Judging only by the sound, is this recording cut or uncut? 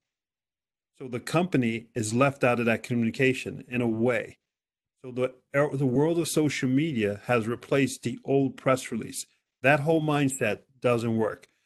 uncut